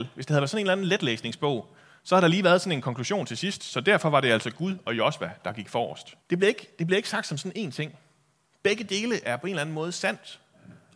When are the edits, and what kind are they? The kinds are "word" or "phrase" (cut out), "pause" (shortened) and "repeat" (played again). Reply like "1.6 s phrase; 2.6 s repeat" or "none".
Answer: 6.2 s pause

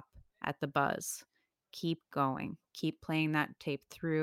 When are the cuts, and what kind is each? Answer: none

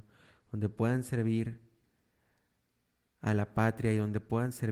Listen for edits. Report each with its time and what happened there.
none

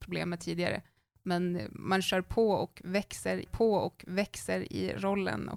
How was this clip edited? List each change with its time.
3.5 s repeat

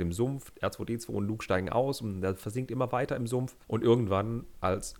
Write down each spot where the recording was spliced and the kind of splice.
3.6 s pause

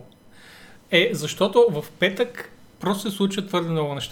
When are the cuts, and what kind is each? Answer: none

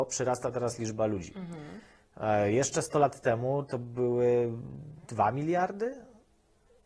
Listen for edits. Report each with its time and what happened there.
none

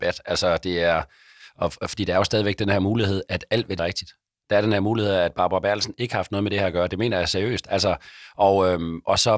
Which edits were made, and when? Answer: 3.8 s word

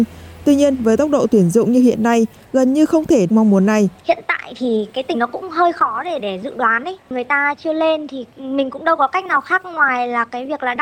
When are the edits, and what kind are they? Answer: 3.3 s phrase; 4.0 s pause; 5.1 s word; 6.2 s word

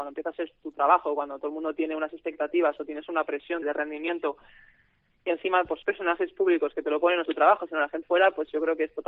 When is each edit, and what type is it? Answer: 3.6 s word; 5.8 s word; 7.3 s word; 8.0 s word

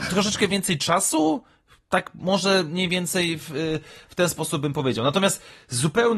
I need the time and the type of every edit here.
none

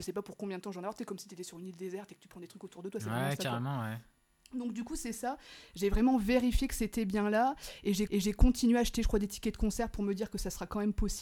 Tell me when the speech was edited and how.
8.1 s repeat

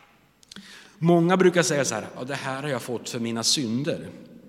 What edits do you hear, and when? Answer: none

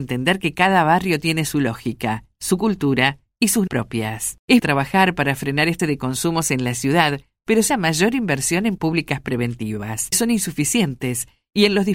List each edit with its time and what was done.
3.7 s word; 4.6 s word; 5.8 s word; 7.7 s word; 8.8 s word; 10.1 s word

